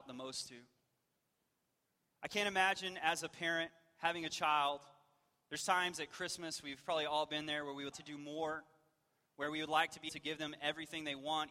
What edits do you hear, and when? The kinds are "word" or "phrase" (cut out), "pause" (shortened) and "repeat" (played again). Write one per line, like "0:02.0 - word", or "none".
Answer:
0:07.9 - word
0:10.1 - word